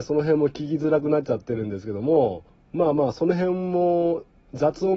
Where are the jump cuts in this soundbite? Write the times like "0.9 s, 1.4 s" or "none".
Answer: 2.5 s